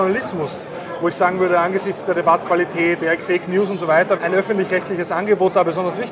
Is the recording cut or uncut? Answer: cut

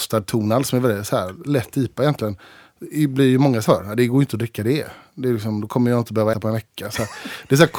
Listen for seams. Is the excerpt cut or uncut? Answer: cut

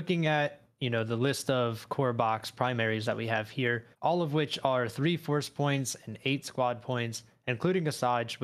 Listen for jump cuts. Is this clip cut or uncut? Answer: cut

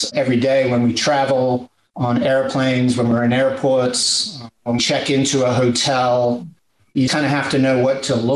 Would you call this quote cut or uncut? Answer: cut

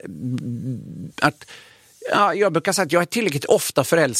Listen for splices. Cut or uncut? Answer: uncut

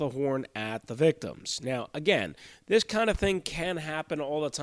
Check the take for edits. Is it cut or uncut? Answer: uncut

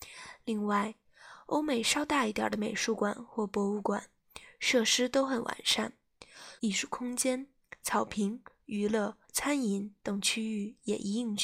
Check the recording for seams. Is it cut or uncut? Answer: cut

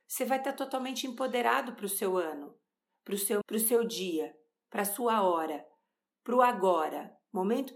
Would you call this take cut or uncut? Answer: cut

